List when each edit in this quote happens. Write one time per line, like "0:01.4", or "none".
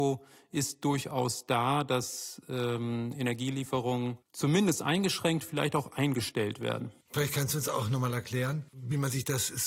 0:04.2
0:07.0
0:08.7